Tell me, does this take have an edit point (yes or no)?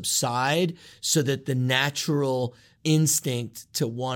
no